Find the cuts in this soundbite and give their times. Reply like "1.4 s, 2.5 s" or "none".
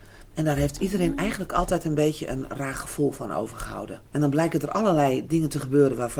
4.1 s